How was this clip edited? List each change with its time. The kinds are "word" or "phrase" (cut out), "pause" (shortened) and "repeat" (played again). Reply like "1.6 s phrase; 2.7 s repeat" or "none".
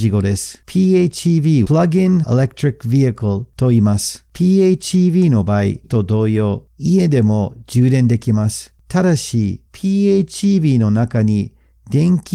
1.6 s word; 2.2 s word; 5.8 s word; 9.7 s pause